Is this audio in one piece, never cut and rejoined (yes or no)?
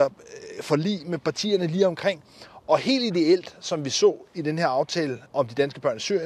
no